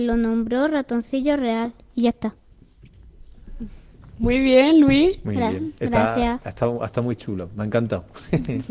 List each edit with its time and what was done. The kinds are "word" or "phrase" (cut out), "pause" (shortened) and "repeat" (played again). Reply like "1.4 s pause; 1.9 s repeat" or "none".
none